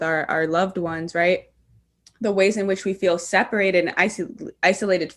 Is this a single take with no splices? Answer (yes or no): yes